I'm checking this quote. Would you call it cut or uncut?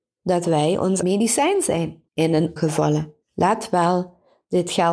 cut